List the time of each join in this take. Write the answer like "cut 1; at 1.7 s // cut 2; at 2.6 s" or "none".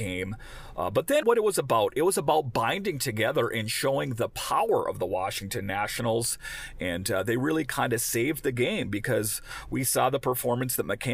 cut 1; at 1.2 s